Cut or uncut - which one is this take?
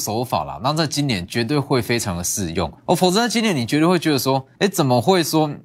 cut